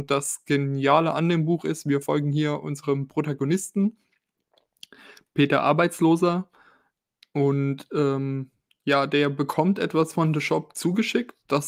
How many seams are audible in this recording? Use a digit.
0